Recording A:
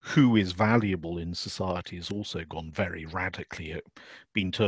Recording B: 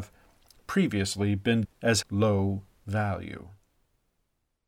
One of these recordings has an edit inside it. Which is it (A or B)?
B